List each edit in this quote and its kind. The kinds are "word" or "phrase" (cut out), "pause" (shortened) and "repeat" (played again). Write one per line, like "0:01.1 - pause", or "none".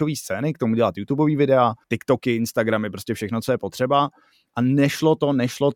0:01.8 - pause